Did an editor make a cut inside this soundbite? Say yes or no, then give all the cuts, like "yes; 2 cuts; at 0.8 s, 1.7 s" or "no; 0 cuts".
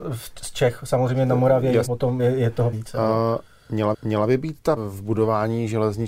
yes; 5 cuts; at 1.9 s, 2.2 s, 2.7 s, 3.9 s, 4.8 s